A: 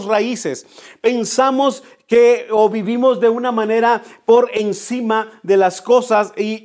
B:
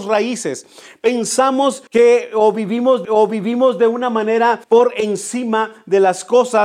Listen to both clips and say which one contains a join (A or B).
B